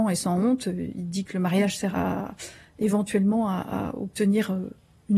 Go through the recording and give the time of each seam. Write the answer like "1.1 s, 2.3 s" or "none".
1.9 s